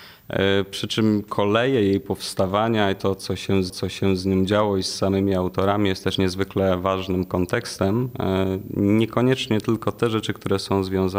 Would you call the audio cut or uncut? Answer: cut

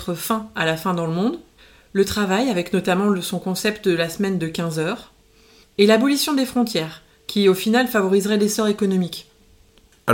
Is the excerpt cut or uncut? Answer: cut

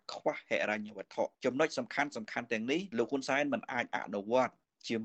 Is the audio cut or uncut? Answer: cut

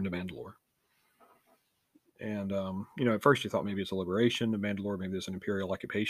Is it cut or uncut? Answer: uncut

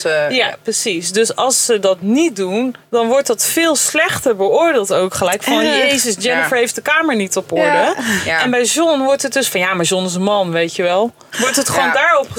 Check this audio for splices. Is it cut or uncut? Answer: uncut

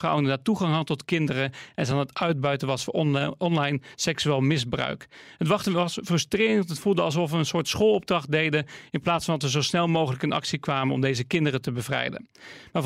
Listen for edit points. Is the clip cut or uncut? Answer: uncut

